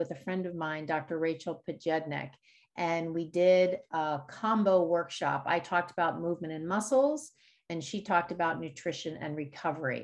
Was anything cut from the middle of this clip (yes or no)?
no